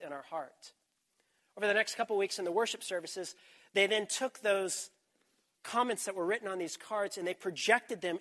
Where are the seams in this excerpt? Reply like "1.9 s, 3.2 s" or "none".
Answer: none